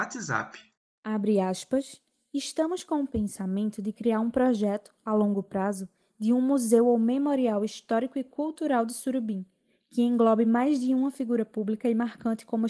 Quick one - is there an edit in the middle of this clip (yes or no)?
no